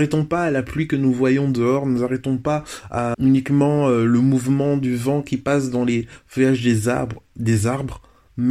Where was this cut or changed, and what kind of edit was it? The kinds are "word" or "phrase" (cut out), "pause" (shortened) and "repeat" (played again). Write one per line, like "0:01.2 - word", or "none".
0:03.1 - word